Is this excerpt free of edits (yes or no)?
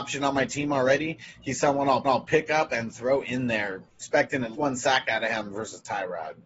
no